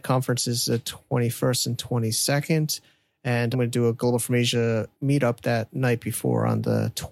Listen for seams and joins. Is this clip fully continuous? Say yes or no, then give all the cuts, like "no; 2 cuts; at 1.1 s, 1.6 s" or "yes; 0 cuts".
no; 2 cuts; at 3.5 s, 4.9 s